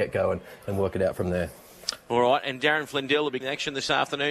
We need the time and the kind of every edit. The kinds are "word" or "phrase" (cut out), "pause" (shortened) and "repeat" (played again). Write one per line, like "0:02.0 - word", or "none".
0:03.4 - word